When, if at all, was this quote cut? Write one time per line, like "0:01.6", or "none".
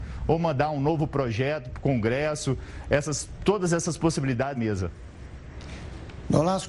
0:04.6